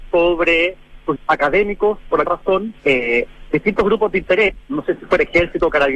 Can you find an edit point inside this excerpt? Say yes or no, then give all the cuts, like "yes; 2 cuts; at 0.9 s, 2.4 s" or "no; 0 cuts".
yes; 3 cuts; at 1.2 s, 2.2 s, 2.8 s